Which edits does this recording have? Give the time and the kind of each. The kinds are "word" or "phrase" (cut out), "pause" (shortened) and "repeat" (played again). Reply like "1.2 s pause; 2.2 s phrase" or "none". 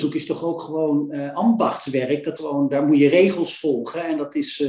2.4 s word